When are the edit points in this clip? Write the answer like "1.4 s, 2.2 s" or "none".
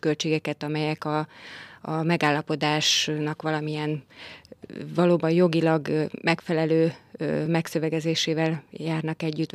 none